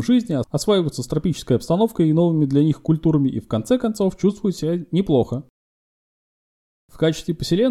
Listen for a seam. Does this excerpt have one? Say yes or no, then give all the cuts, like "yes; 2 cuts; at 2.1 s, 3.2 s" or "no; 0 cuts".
no; 0 cuts